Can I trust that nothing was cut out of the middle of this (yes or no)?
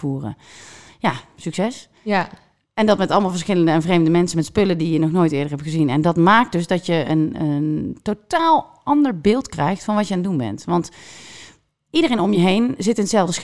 yes